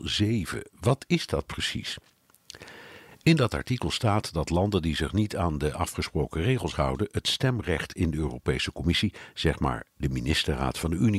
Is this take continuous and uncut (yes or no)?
yes